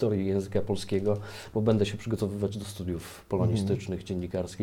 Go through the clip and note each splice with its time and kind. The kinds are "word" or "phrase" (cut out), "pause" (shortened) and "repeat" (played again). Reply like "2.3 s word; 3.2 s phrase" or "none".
none